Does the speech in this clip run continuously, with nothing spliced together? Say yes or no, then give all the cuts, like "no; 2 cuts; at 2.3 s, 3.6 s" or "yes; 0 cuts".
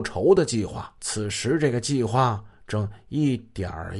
no; 1 cut; at 1.0 s